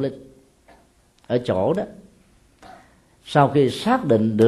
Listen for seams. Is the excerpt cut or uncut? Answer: uncut